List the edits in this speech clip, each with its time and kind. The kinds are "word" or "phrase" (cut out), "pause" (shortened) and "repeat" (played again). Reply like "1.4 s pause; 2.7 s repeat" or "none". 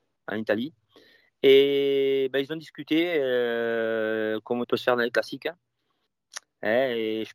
4.6 s phrase